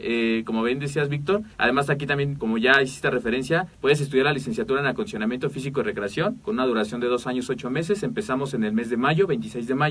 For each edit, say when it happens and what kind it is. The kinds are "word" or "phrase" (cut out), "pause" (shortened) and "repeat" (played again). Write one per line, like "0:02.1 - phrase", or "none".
0:01.5 - pause
0:02.4 - word
0:03.7 - pause